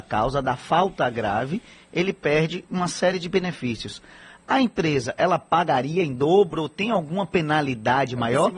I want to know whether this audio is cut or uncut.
uncut